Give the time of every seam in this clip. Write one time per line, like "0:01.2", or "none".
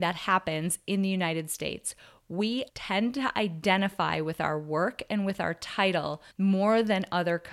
0:02.7
0:06.3